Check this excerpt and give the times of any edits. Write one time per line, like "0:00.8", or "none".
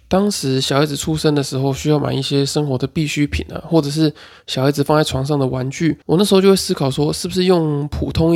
0:06.0